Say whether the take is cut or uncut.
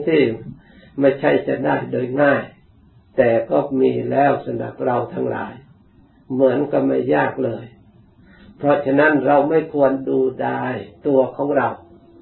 uncut